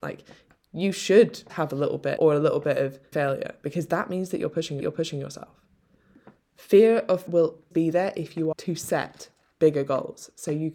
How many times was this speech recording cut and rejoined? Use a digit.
7